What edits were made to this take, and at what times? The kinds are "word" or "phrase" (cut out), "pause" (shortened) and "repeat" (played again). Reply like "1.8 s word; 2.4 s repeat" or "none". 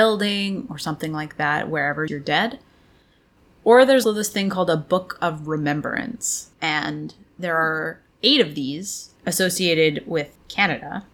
2.1 s phrase; 4.0 s word; 6.5 s pause